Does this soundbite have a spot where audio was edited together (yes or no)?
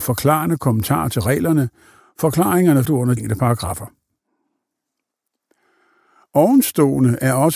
yes